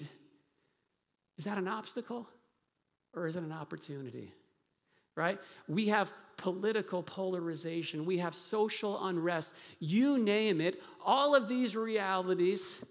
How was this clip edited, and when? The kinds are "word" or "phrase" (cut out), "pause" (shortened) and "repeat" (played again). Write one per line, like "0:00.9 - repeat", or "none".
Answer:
none